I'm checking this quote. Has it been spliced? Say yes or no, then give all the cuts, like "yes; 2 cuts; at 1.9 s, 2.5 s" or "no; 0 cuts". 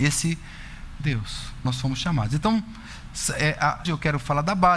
yes; 3 cuts; at 1.0 s, 1.6 s, 3.8 s